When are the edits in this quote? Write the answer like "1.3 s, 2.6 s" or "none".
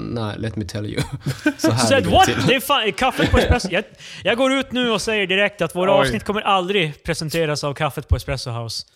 none